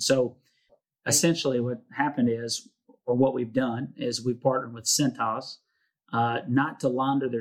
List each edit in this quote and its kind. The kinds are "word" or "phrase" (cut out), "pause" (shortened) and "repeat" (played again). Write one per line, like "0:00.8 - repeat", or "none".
none